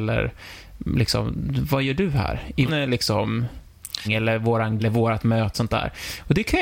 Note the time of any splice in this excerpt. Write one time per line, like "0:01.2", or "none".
0:02.7
0:04.0
0:04.8
0:05.5